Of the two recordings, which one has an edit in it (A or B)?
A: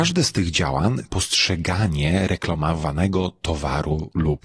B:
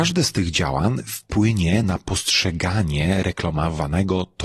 A